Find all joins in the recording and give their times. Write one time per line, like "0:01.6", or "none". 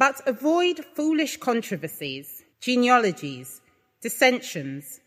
0:02.5